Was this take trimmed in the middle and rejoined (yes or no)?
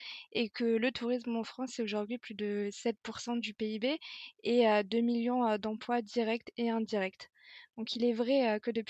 no